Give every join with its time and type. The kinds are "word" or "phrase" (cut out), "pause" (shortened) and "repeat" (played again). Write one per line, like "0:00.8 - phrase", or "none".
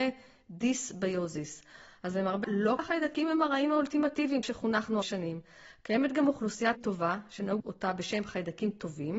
0:02.4 - word
0:02.8 - word
0:04.4 - word
0:05.0 - word
0:06.7 - word
0:07.6 - word